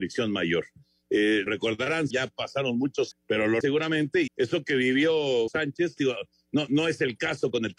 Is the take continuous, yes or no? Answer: no